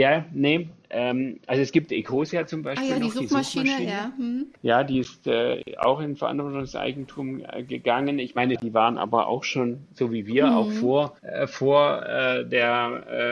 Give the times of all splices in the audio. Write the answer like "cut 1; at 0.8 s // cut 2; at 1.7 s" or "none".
cut 1; at 4.6 s // cut 2; at 8.6 s // cut 3; at 11.2 s